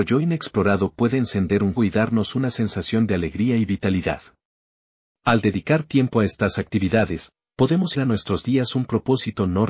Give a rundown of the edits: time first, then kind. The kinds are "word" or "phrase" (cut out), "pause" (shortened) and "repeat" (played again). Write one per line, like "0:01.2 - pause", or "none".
0:01.8 - word
0:07.9 - word